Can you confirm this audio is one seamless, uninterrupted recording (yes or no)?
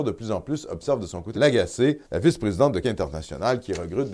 no